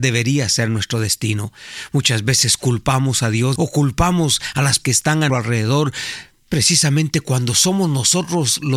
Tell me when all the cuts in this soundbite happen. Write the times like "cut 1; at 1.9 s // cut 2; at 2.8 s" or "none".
cut 1; at 3.6 s // cut 2; at 4.8 s // cut 3; at 5.3 s